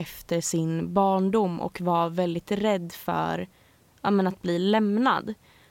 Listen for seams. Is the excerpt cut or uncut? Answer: uncut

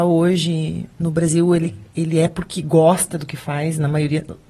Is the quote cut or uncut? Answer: uncut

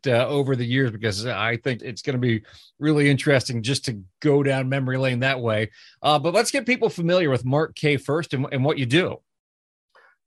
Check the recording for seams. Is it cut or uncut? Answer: cut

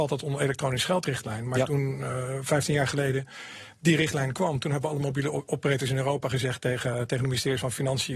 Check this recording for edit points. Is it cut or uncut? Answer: uncut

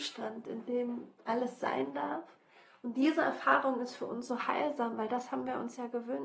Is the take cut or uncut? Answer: uncut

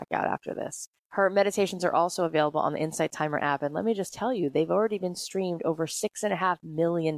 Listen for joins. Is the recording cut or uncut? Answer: cut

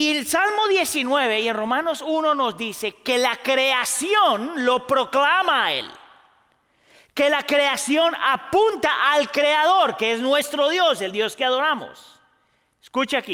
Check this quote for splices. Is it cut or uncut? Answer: uncut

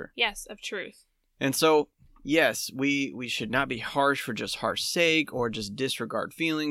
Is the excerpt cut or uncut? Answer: uncut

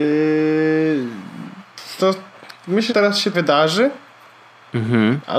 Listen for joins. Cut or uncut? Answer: cut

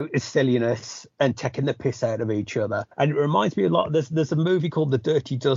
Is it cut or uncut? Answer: cut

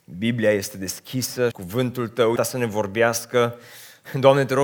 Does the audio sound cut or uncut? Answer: cut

